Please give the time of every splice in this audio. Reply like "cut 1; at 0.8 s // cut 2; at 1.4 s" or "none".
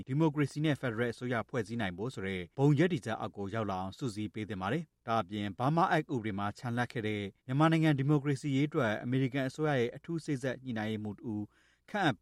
cut 1; at 7.4 s